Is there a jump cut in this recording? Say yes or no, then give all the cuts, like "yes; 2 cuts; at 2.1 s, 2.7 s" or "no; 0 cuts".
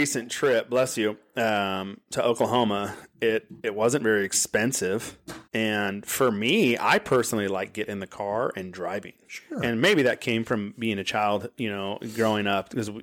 yes; 2 cuts; at 3.6 s, 5.5 s